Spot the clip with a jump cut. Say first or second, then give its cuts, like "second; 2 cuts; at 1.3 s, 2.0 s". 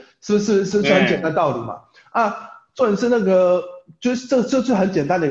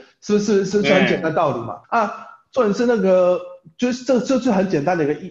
second; 1 cut; at 1.8 s